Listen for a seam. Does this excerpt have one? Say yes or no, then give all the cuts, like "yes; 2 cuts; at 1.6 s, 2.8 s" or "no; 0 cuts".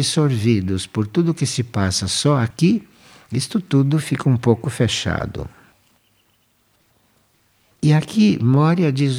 no; 0 cuts